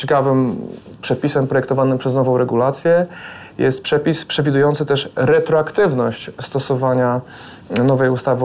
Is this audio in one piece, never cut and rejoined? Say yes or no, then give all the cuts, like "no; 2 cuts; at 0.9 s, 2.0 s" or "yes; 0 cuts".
yes; 0 cuts